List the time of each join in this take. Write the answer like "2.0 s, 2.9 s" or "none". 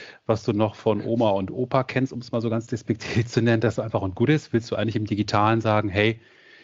3.8 s